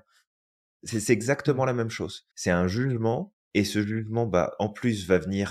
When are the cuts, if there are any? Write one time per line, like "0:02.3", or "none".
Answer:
0:02.3
0:03.4